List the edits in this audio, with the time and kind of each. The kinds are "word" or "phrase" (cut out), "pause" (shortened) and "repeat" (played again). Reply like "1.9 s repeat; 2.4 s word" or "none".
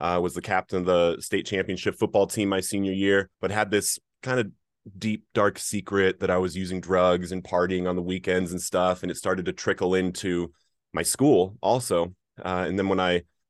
3.3 s pause

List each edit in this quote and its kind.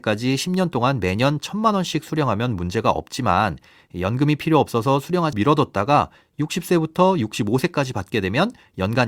5.3 s word

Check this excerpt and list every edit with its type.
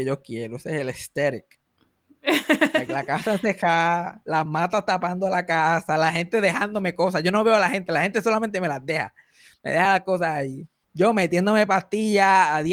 none

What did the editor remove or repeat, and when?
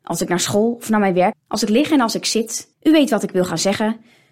1.3 s word; 2.7 s pause

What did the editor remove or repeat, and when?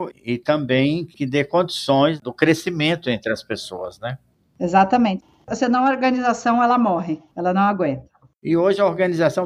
none

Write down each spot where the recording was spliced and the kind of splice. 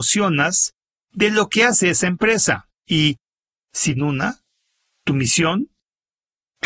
4.0 s phrase

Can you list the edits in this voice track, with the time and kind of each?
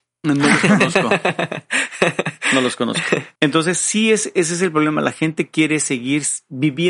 3.4 s pause

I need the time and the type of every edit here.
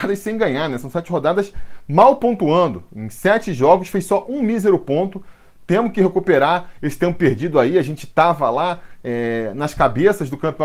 none

